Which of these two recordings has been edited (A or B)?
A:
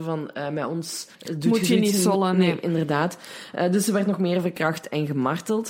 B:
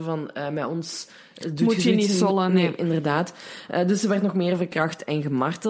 A